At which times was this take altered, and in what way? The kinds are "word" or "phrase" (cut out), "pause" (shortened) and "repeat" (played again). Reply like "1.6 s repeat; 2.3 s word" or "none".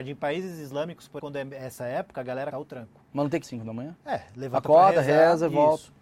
1.2 s word; 2.5 s phrase; 3.4 s word